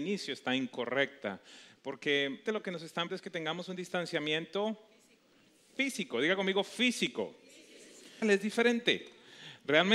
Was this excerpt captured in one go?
no; 3 cuts; at 2.5 s, 3.1 s, 8.2 s

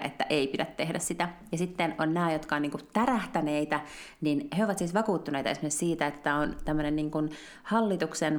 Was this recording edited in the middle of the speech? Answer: no; 0 cuts

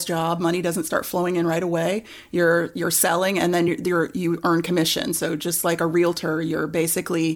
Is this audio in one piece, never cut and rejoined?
yes; 0 cuts

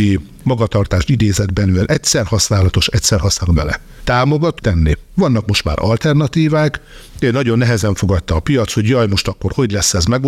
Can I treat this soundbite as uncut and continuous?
no; 2 cuts; at 3.5 s, 4.6 s

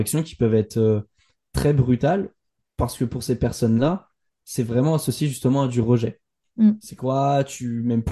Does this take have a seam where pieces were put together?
no; 0 cuts

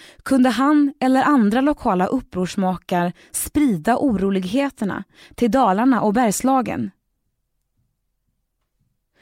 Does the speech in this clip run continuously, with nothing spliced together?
yes; 0 cuts

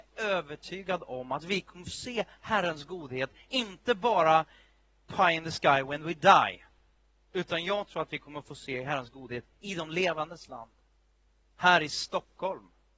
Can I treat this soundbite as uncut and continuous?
yes; 0 cuts

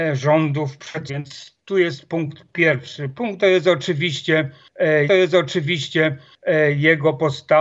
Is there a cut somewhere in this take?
yes; 3 cuts; at 1.1 s, 3.4 s, 5.1 s

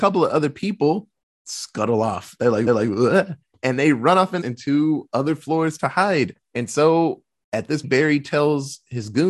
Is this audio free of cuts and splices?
no; 4 cuts; at 2.7 s, 4.4 s, 6.4 s, 7.8 s

